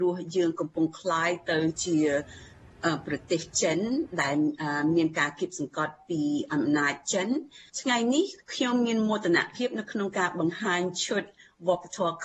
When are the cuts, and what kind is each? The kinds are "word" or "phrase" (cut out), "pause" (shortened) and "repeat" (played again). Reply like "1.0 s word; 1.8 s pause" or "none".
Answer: 7.7 s pause; 8.4 s pause